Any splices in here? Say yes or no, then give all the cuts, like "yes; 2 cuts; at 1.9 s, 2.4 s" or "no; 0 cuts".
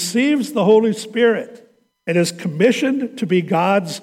yes; 1 cut; at 1.9 s